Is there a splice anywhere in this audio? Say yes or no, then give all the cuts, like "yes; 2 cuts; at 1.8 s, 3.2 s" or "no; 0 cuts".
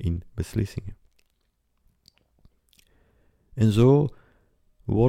no; 0 cuts